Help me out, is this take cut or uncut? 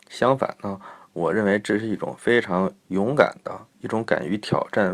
cut